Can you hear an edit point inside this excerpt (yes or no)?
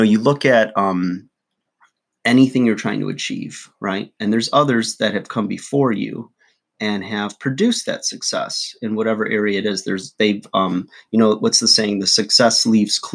no